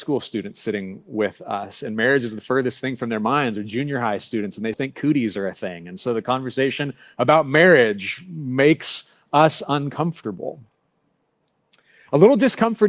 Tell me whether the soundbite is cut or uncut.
cut